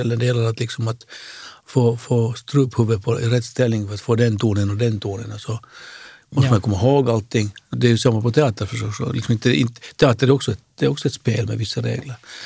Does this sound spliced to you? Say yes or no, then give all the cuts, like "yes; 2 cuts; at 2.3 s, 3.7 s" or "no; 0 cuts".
yes; 1 cut; at 7.7 s